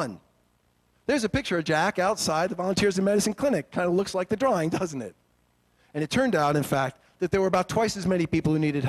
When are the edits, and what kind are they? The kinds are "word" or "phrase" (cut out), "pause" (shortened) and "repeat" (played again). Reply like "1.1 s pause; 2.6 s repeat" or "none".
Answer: none